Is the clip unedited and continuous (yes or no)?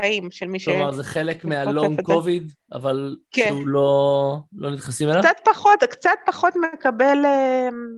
yes